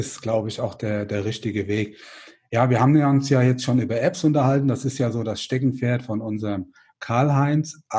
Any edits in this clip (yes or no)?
no